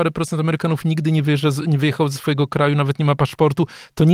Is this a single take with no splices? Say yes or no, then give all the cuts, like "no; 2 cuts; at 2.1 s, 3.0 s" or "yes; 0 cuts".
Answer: yes; 0 cuts